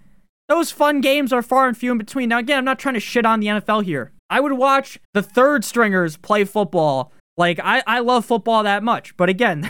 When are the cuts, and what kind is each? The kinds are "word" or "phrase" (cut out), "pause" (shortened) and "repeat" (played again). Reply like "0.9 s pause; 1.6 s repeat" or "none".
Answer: 4.2 s pause; 5.0 s pause; 7.2 s pause